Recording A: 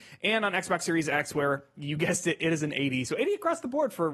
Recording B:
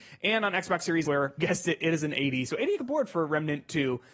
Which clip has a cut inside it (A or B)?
B